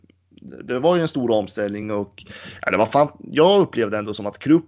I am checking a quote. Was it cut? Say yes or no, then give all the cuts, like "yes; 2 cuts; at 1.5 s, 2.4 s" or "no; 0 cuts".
no; 0 cuts